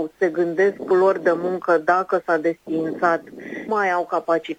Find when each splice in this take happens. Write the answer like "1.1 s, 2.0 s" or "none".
0.9 s, 3.7 s